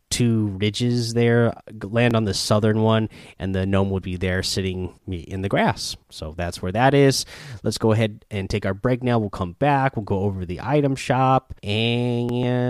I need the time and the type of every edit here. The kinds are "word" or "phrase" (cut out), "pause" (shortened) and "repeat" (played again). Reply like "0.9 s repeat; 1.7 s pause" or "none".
4.0 s word; 5.0 s pause; 6.0 s pause; 11.6 s pause